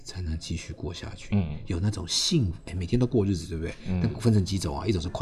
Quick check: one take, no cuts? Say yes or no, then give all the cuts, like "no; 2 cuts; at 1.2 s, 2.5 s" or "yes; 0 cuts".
yes; 0 cuts